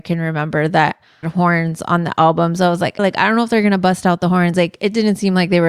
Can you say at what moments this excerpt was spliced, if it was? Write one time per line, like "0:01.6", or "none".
0:01.2
0:03.0